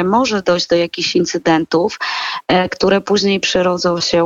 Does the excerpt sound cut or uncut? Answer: uncut